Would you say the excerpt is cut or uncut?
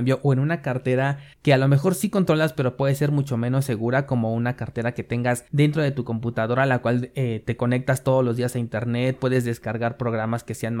cut